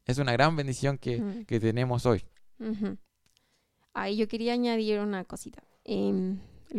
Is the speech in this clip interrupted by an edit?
no; 0 cuts

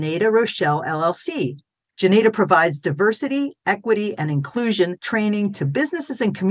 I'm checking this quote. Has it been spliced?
no; 0 cuts

